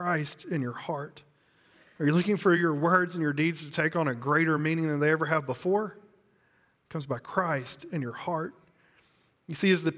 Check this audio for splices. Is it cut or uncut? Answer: uncut